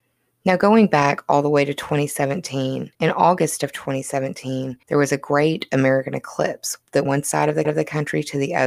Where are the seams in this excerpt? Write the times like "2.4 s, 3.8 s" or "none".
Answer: 2.9 s, 4.8 s, 7.0 s, 7.6 s